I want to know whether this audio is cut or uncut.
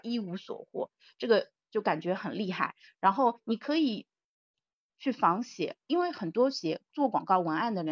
uncut